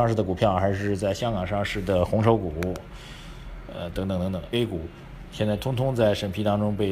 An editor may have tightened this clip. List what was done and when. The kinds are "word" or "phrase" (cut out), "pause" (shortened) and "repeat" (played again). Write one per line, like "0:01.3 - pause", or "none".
0:04.5 - phrase